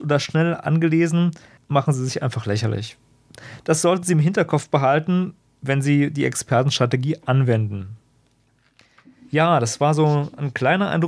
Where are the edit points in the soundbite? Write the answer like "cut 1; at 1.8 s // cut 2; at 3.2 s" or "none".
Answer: none